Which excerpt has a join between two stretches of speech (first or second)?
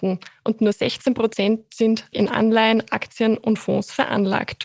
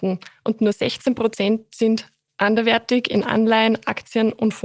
first